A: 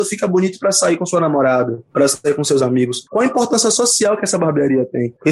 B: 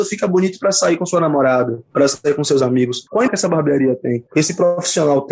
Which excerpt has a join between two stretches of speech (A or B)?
B